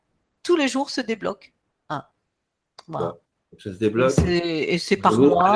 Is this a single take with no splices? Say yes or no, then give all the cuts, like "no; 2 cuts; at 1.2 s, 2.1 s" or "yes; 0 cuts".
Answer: yes; 0 cuts